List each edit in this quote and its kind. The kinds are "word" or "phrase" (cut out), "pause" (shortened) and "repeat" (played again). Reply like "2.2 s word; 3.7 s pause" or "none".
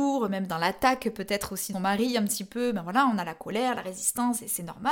1.7 s word